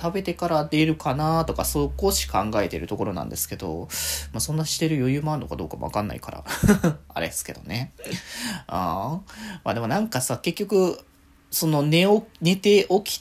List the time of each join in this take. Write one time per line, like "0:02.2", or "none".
none